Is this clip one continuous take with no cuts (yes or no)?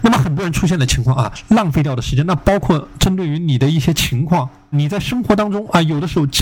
no